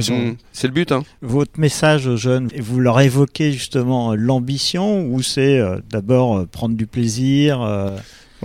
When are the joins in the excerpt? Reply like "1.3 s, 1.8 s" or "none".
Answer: none